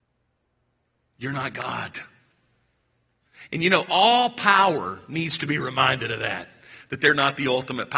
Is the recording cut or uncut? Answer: uncut